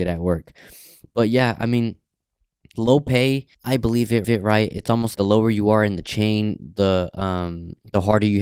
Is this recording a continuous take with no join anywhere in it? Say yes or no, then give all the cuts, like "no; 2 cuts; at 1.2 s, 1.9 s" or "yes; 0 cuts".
no; 3 cuts; at 3.5 s, 4.2 s, 5.1 s